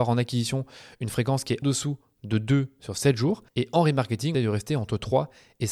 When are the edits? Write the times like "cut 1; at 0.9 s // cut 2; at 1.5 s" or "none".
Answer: cut 1; at 1.6 s // cut 2; at 4.3 s